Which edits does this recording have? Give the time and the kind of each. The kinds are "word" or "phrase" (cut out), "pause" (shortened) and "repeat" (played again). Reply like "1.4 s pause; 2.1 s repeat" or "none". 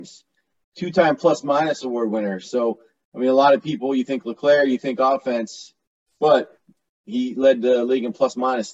none